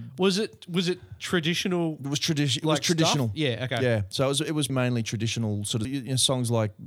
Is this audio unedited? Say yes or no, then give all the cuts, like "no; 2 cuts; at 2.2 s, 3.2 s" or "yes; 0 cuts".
no; 2 cuts; at 4.7 s, 5.8 s